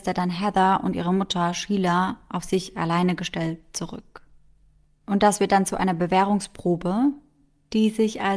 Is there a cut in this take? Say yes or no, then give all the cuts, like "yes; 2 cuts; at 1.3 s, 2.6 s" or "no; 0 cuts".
no; 0 cuts